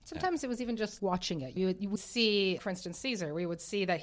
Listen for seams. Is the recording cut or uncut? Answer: cut